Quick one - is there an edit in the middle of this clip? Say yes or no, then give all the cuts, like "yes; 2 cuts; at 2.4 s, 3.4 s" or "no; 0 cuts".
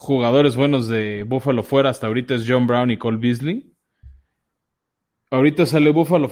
no; 0 cuts